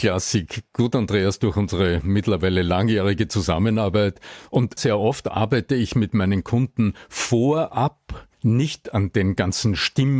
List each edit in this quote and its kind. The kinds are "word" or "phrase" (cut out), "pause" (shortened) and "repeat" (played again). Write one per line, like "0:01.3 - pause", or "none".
0:04.8 - word
0:08.3 - pause